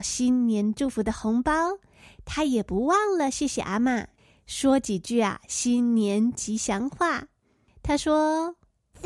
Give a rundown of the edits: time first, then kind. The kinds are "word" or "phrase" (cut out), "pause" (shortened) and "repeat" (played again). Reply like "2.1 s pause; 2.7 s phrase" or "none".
none